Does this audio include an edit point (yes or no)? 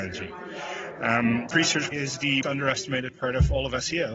yes